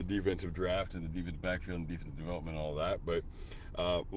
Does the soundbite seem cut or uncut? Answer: uncut